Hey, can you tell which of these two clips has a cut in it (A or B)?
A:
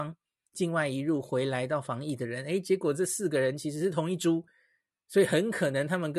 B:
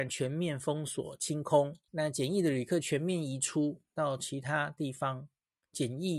B